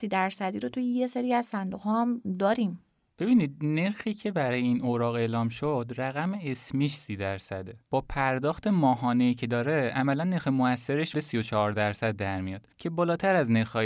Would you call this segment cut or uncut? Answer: cut